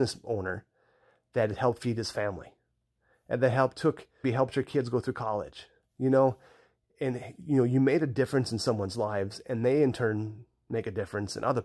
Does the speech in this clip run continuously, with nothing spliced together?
no; 1 cut; at 4.2 s

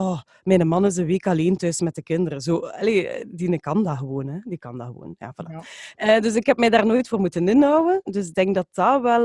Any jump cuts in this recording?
no; 0 cuts

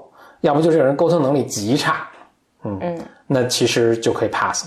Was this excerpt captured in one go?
yes; 0 cuts

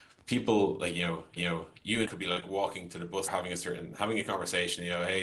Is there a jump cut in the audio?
yes; 3 cuts; at 1.4 s, 2.0 s, 3.3 s

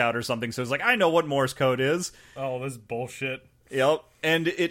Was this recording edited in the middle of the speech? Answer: no; 0 cuts

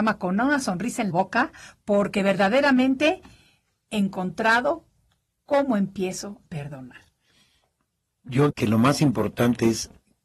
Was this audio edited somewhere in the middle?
yes; 4 cuts; at 1.1 s, 3.8 s, 6.4 s, 8.5 s

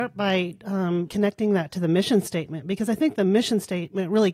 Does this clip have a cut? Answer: yes; 1 cut; at 1.1 s

